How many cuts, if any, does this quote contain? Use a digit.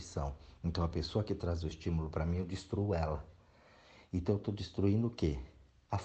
0